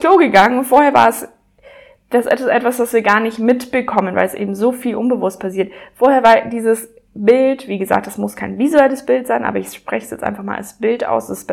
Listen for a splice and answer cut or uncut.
uncut